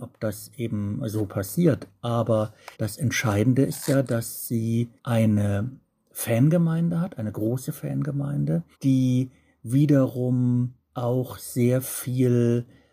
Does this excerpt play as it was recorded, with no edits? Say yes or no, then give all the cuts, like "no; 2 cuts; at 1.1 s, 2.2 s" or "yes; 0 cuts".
no; 4 cuts; at 2.7 s, 5.0 s, 8.7 s, 10.8 s